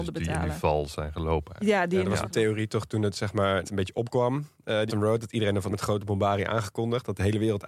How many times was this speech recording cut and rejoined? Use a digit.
4